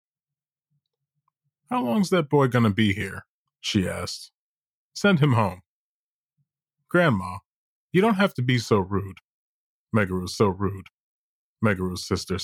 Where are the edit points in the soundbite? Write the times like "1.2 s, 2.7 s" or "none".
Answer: 3.5 s, 10.4 s